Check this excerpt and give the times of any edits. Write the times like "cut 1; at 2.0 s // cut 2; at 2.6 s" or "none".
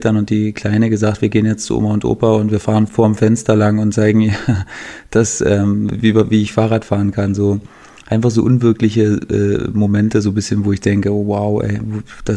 none